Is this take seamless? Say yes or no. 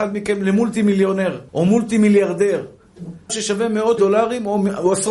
no